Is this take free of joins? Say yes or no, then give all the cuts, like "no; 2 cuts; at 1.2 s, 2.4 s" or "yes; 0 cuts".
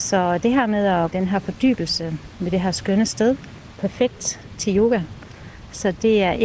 no; 2 cuts; at 1.1 s, 3.8 s